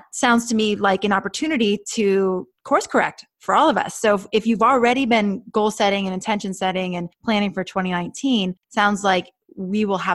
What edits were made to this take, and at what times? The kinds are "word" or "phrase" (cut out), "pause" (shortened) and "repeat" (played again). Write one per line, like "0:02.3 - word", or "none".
none